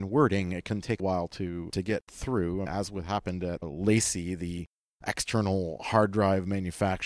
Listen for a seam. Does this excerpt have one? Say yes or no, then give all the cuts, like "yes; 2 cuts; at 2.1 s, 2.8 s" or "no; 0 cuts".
yes; 4 cuts; at 1.0 s, 1.7 s, 2.7 s, 3.6 s